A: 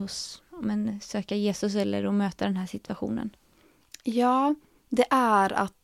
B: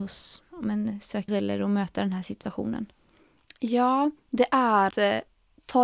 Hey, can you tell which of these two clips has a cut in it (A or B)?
B